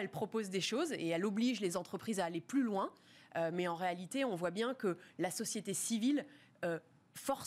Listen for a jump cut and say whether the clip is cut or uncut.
uncut